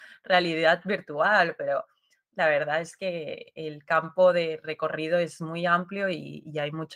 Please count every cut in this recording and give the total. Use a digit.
0